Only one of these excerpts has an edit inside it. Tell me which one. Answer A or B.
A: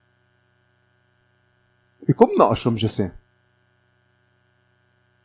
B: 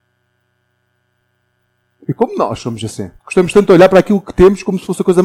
B